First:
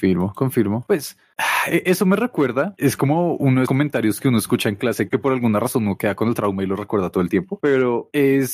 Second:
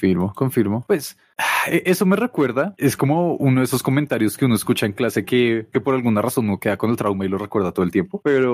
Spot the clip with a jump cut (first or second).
first